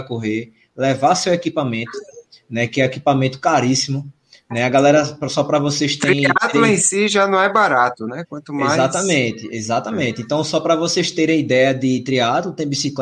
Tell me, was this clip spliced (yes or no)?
no